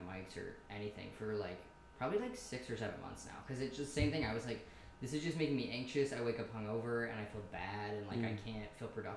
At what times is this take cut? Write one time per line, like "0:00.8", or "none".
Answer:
none